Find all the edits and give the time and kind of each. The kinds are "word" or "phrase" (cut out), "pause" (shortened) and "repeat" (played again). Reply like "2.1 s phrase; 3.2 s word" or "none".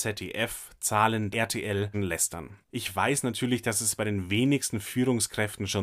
1.3 s phrase; 1.9 s phrase